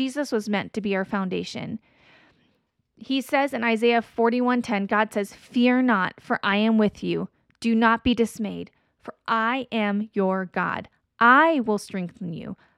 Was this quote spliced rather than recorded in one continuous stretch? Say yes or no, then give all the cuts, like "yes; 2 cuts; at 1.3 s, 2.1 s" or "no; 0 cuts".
no; 0 cuts